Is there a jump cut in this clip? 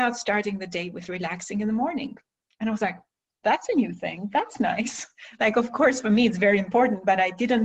no; 0 cuts

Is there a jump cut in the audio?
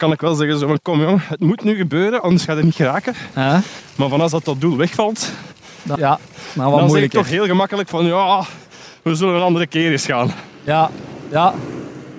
yes; 1 cut; at 6.0 s

